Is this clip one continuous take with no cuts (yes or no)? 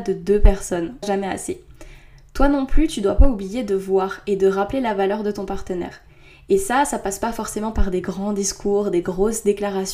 no